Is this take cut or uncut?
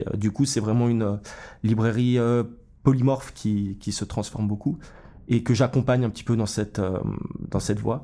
uncut